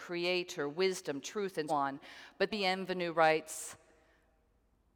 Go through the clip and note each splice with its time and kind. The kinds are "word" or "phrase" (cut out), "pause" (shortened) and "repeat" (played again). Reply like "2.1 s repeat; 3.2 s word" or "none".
1.7 s word; 2.5 s word